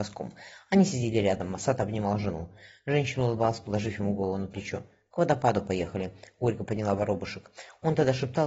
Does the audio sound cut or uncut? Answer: uncut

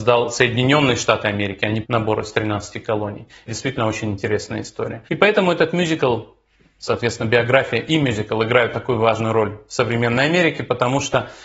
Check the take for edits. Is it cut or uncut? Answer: cut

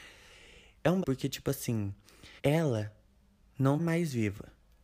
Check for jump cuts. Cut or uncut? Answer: cut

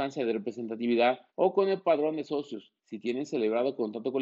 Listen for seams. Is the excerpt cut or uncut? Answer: cut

